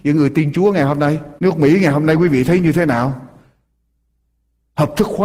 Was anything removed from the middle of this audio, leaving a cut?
yes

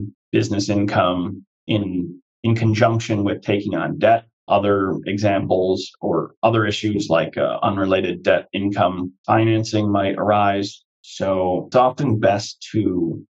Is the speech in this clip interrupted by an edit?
yes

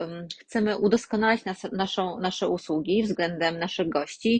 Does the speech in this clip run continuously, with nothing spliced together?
yes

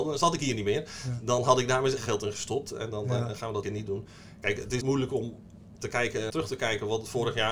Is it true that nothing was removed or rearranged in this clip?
no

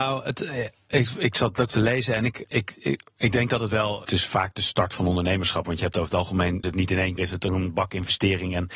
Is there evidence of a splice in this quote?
yes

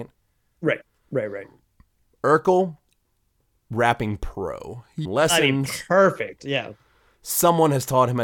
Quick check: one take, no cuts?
no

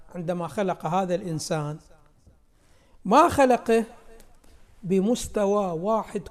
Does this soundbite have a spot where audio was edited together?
no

